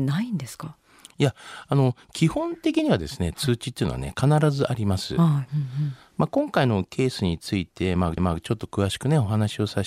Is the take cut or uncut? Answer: cut